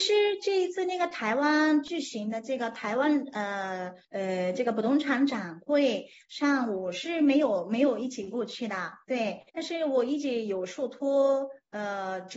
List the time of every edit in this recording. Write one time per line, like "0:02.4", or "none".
0:04.0
0:09.5